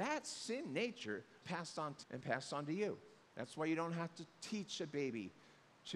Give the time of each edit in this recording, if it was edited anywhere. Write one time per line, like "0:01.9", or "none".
0:01.4
0:02.0
0:03.2